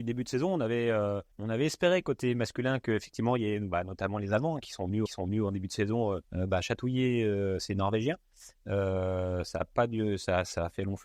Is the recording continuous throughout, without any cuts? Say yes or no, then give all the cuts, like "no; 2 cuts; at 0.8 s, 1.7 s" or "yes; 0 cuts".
no; 3 cuts; at 1.3 s, 5.1 s, 6.2 s